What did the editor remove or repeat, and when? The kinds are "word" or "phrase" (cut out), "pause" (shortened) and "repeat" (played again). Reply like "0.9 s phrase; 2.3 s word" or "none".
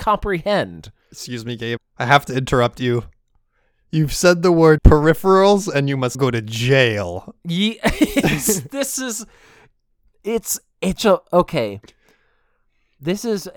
1.8 s word; 4.8 s word; 6.1 s word; 11.0 s word